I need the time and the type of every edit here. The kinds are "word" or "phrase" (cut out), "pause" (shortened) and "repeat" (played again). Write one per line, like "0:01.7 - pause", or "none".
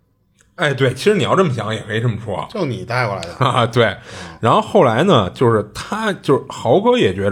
none